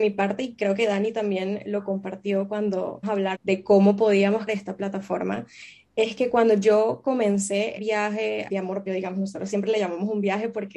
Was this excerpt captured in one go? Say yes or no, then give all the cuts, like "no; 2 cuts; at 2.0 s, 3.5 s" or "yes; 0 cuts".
no; 6 cuts; at 3.0 s, 3.3 s, 4.5 s, 7.8 s, 8.5 s, 8.9 s